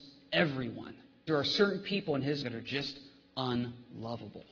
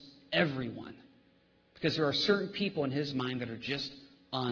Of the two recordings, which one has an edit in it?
first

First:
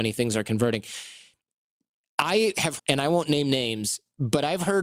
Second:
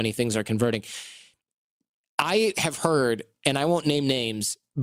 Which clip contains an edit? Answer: first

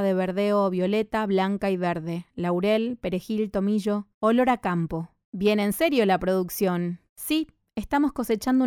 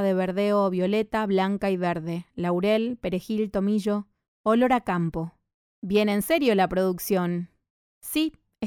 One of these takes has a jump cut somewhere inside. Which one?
first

